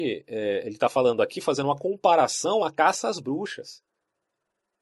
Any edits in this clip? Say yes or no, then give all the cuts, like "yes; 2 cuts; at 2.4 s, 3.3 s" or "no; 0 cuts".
no; 0 cuts